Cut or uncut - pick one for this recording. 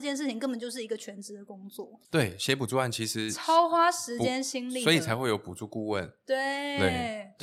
cut